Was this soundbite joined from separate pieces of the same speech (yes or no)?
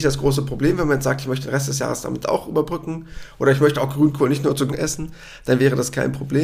yes